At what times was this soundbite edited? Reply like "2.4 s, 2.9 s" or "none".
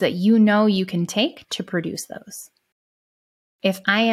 none